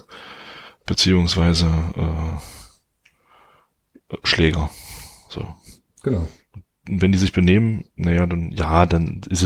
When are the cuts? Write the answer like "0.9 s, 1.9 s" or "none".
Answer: none